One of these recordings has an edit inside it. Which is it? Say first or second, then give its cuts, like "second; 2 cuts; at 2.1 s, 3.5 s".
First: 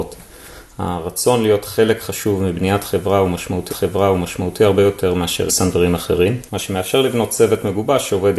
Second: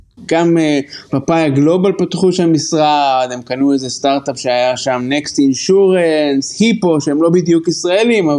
first; 3 cuts; at 3.7 s, 5.5 s, 6.5 s